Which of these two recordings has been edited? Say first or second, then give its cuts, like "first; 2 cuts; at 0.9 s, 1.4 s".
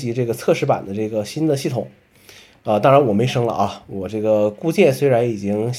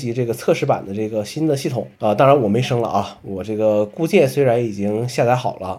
second; 1 cut; at 2.0 s